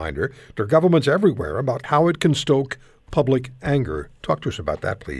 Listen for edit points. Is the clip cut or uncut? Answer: cut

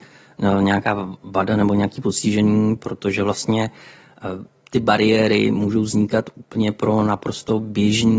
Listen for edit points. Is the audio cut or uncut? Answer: cut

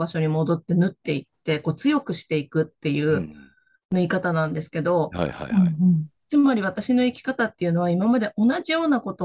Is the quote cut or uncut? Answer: uncut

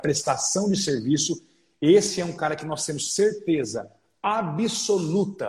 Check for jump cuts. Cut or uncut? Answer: uncut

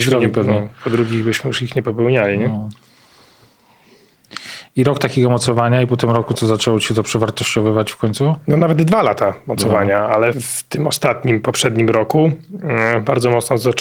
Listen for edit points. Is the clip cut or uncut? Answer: cut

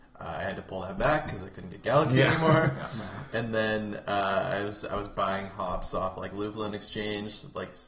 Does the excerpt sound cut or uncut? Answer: uncut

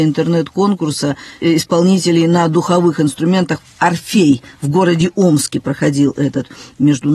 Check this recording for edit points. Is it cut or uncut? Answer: uncut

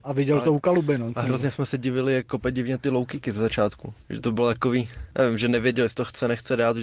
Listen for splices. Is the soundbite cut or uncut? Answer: cut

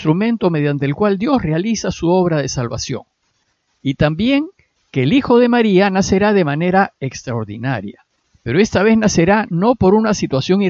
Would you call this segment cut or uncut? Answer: cut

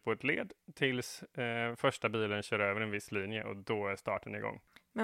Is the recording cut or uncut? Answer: uncut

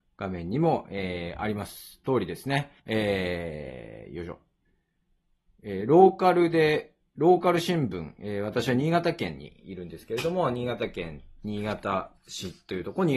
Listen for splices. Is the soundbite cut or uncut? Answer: cut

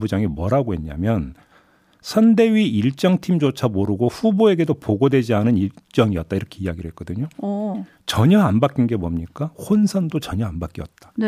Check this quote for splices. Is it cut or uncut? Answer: uncut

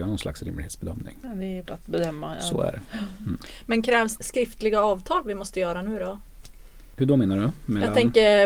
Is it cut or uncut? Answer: cut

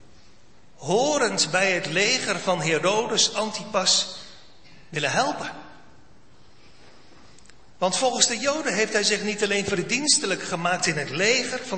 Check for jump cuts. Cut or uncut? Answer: uncut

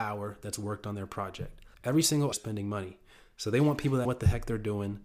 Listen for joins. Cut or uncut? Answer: cut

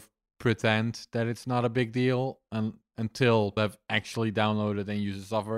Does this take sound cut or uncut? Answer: cut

